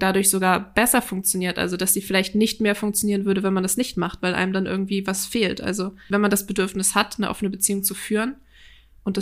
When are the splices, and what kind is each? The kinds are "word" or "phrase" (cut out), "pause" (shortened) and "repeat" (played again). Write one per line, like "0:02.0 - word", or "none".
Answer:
none

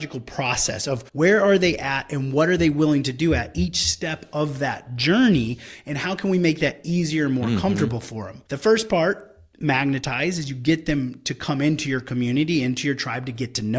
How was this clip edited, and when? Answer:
0:01.1 - pause

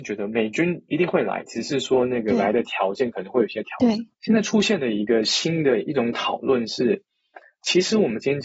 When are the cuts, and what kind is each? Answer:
0:04.1 - pause

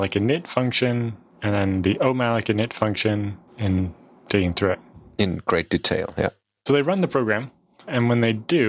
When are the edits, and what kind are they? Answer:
none

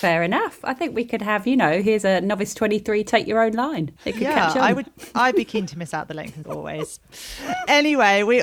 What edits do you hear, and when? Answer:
0:04.0 - pause
0:06.4 - word

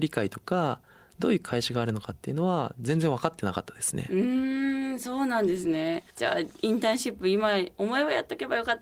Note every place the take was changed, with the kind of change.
0:06.1 - pause

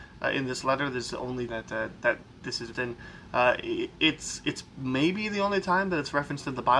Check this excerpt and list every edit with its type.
0:01.5 - word
0:02.7 - word

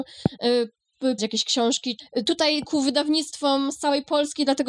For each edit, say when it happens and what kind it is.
0:01.2 - word
0:02.6 - phrase

